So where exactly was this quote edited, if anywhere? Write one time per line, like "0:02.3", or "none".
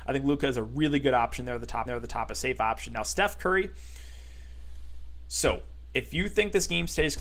0:01.9